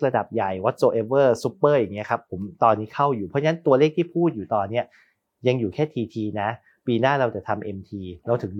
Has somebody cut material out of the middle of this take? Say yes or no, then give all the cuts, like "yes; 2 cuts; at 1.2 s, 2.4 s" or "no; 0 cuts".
no; 0 cuts